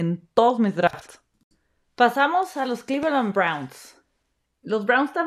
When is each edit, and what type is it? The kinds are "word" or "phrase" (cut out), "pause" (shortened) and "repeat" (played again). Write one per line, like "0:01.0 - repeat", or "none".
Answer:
none